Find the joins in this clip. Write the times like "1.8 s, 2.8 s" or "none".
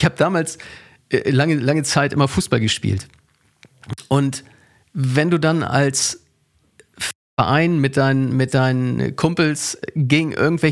none